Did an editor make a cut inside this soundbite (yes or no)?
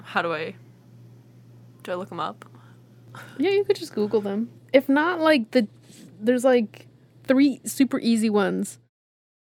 no